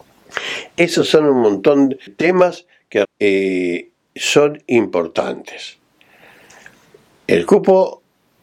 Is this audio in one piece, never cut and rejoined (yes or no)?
no